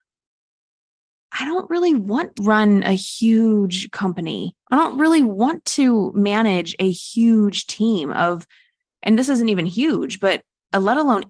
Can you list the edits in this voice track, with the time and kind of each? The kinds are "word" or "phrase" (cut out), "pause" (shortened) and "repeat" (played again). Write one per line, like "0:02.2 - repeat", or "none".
0:02.3 - word
0:04.6 - pause